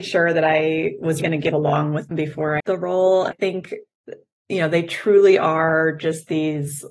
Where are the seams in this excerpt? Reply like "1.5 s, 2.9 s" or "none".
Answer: 1.2 s, 2.1 s, 2.6 s, 3.3 s